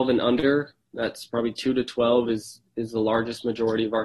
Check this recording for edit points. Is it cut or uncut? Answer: uncut